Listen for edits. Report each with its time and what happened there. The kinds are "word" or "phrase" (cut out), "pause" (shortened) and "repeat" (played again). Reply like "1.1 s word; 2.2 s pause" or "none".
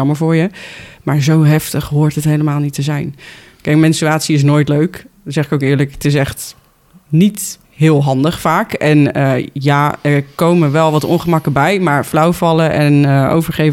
none